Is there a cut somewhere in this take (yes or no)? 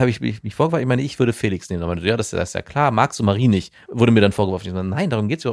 no